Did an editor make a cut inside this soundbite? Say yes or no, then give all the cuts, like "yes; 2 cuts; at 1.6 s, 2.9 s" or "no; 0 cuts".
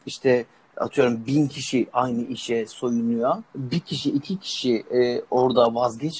yes; 1 cut; at 3.5 s